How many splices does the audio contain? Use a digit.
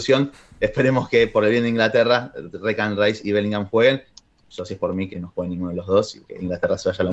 2